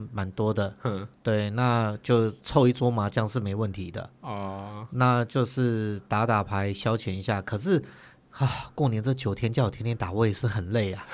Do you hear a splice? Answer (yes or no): no